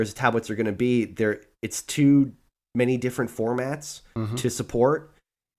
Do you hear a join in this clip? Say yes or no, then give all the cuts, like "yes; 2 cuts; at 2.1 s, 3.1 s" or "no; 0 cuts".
no; 0 cuts